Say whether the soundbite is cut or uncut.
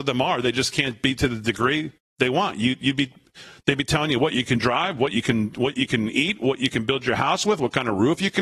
uncut